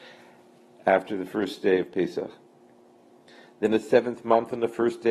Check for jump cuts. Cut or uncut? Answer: uncut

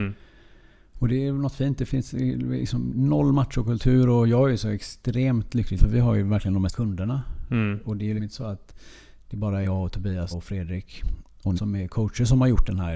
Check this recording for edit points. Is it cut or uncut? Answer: cut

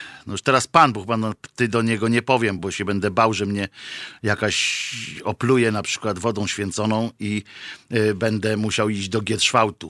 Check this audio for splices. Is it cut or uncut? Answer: cut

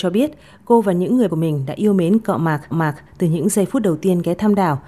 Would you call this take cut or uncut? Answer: cut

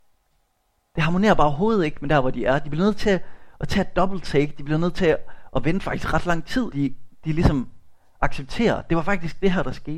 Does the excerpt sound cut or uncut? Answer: cut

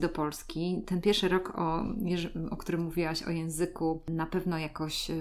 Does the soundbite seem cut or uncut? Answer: uncut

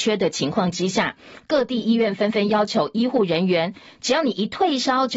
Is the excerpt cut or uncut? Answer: uncut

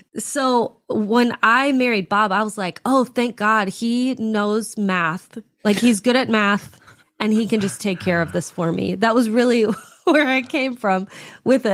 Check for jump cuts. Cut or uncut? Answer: uncut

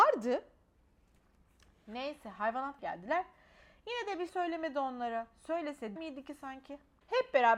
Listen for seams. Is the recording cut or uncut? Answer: cut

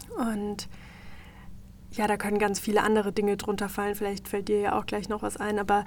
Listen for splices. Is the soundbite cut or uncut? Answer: uncut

